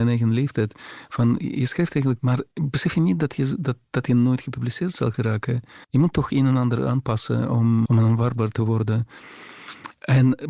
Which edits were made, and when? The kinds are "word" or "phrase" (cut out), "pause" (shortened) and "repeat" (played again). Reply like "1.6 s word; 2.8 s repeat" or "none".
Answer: 2.2 s word; 2.5 s pause; 5.8 s pause; 7.9 s word